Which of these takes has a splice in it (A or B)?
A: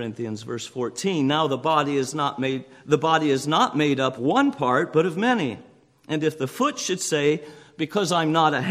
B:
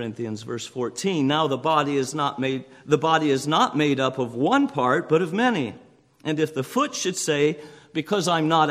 A